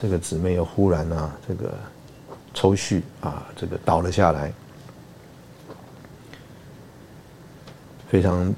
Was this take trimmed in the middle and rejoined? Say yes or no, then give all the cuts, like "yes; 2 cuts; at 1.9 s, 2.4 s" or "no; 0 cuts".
yes; 1 cut; at 2.5 s